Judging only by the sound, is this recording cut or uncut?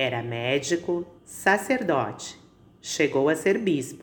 cut